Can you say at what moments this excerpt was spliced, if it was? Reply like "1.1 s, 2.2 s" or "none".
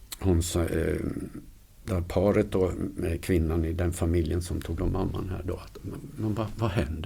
4.8 s